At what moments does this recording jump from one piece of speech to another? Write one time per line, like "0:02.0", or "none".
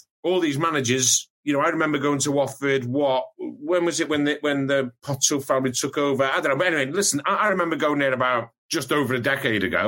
0:08.6